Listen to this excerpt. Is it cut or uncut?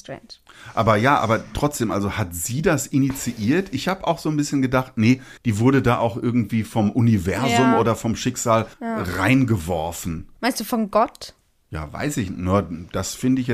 cut